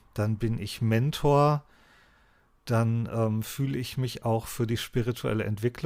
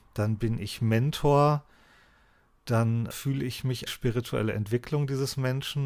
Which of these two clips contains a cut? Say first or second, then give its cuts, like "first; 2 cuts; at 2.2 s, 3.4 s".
second; 2 cuts; at 3.1 s, 3.9 s